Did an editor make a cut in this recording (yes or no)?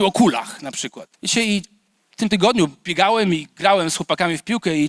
yes